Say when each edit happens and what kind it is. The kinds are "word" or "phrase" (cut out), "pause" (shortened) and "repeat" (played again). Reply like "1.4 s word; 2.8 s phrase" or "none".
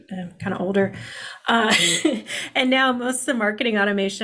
none